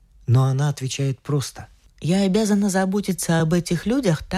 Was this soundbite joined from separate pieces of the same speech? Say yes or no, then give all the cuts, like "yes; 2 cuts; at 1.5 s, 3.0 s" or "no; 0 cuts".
no; 0 cuts